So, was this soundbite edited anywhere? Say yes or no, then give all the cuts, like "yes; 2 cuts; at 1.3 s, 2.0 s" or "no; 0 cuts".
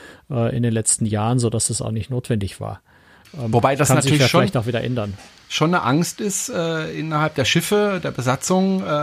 no; 0 cuts